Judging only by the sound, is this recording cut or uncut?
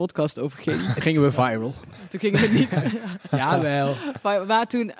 cut